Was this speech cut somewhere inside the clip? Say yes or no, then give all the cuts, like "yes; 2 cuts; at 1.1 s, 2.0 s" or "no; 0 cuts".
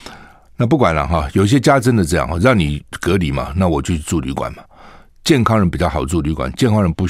no; 0 cuts